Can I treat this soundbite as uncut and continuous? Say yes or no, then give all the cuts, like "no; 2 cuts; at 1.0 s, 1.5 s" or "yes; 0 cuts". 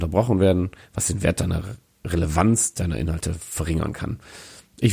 yes; 0 cuts